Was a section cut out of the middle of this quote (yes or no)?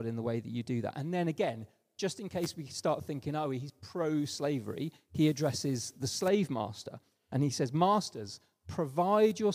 no